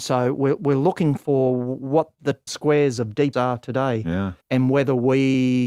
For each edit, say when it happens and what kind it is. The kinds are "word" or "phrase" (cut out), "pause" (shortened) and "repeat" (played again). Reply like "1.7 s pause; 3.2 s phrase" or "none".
2.5 s word; 3.3 s word; 4.4 s pause